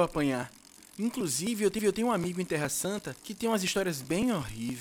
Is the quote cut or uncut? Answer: cut